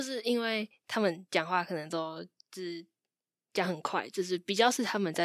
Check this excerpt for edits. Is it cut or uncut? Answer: uncut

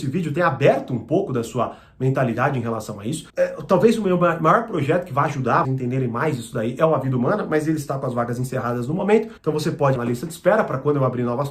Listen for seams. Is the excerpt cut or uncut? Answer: cut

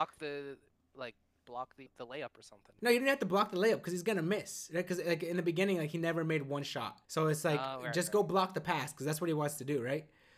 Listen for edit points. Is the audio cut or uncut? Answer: cut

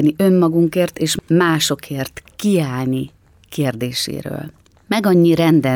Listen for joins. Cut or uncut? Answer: uncut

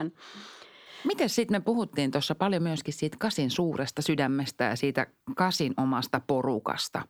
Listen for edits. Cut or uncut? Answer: uncut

